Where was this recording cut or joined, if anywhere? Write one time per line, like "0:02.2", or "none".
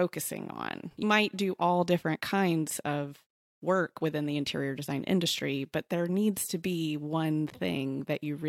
0:01.0